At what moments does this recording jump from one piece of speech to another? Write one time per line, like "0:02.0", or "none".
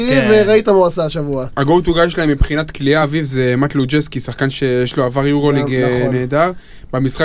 none